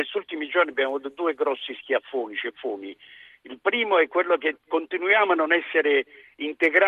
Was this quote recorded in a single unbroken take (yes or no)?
yes